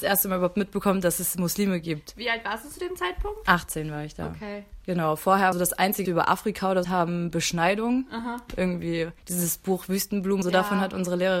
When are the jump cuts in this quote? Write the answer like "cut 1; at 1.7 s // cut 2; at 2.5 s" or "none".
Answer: cut 1; at 5.5 s // cut 2; at 6.1 s // cut 3; at 6.8 s // cut 4; at 9.2 s // cut 5; at 10.4 s